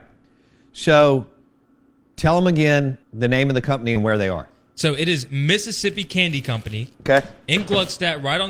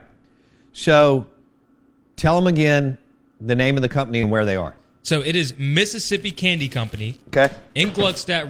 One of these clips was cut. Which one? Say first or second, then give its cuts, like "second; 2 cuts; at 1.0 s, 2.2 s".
first; 1 cut; at 3.0 s